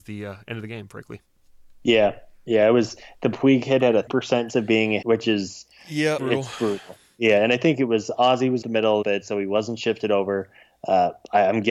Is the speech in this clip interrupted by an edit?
yes; 6 cuts; at 4.1 s, 4.5 s, 5.0 s, 6.2 s, 8.6 s, 9.0 s

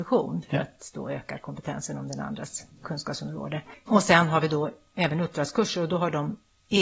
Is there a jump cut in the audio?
no; 0 cuts

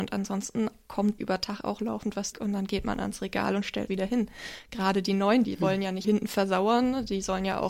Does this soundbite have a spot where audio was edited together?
yes; 5 cuts; at 1.2 s, 2.3 s, 3.9 s, 5.4 s, 6.0 s

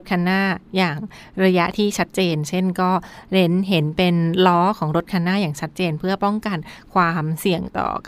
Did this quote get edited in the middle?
no; 0 cuts

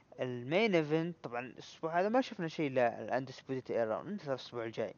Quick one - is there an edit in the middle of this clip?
no; 0 cuts

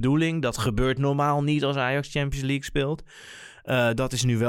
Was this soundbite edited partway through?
no; 0 cuts

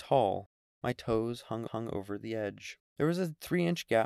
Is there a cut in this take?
yes; 2 cuts; at 1.7 s, 2.9 s

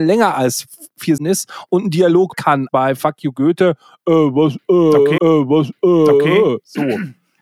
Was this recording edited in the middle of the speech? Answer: yes; 4 cuts; at 1.2 s, 2.3 s, 2.7 s, 5.2 s

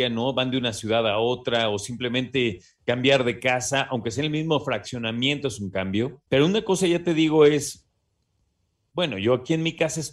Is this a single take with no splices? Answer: yes; 0 cuts

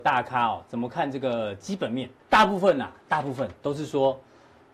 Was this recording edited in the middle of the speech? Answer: yes; 1 cut; at 2.2 s

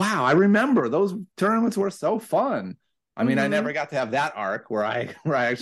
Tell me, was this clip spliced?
no; 0 cuts

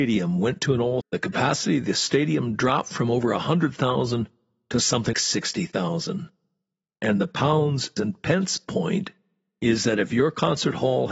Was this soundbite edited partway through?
yes; 3 cuts; at 1.0 s, 5.1 s, 8.0 s

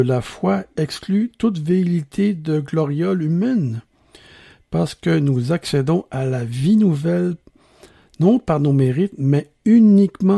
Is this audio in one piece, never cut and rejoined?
yes; 0 cuts

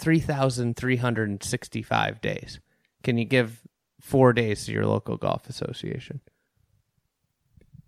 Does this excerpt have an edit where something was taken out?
no; 0 cuts

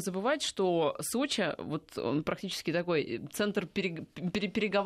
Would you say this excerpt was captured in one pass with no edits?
yes; 0 cuts

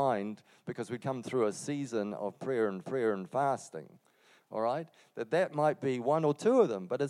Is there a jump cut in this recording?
yes; 2 cuts; at 1.0 s, 2.8 s

